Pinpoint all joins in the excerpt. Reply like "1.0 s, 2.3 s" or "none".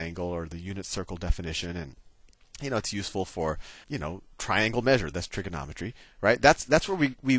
3.8 s